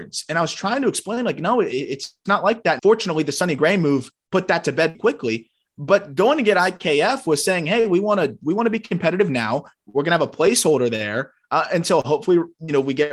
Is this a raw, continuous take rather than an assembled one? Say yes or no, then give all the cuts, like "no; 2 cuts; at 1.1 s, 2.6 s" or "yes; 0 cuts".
no; 2 cuts; at 2.8 s, 4.9 s